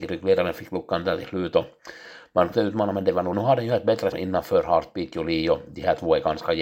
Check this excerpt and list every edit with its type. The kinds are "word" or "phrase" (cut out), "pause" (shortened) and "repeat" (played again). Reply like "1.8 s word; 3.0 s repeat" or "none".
2.5 s word; 3.3 s phrase; 4.1 s word